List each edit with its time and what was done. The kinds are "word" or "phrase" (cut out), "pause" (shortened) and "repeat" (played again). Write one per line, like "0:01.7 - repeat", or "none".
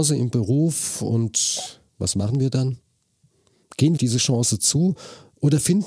0:01.9 - pause
0:04.0 - phrase